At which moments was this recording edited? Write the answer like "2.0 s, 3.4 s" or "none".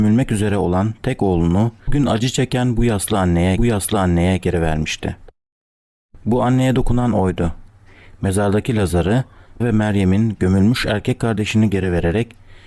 1.9 s, 3.6 s, 9.6 s